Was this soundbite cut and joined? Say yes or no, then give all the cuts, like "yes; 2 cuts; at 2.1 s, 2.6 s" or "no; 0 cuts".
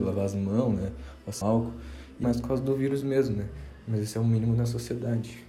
yes; 2 cuts; at 1.4 s, 2.2 s